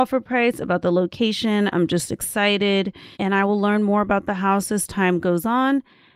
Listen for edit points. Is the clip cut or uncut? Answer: cut